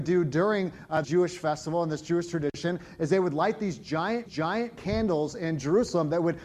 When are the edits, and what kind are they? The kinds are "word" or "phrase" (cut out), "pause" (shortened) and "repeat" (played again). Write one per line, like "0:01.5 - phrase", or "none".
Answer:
0:01.0 - word
0:04.3 - repeat